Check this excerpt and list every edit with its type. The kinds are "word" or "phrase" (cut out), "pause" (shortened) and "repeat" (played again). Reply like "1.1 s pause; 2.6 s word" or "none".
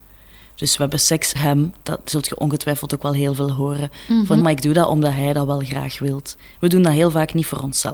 1.3 s word; 4.4 s word